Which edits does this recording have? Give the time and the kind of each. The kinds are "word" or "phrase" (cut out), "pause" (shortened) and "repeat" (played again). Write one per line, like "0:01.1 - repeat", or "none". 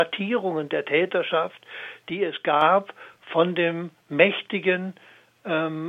none

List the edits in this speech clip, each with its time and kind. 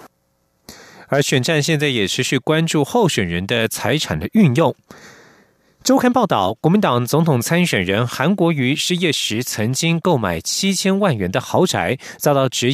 none

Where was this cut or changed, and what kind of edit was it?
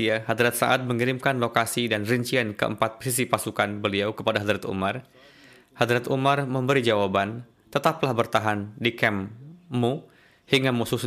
none

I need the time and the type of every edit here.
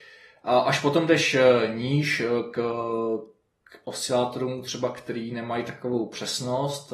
none

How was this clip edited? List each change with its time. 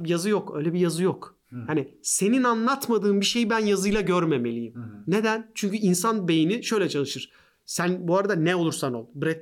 none

